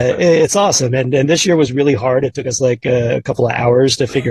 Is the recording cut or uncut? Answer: uncut